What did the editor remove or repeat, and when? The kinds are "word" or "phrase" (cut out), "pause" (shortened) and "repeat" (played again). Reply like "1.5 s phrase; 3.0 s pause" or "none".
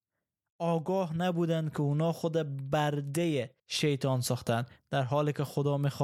3.6 s pause